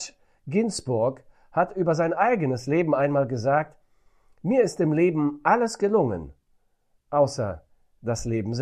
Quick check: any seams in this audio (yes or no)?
no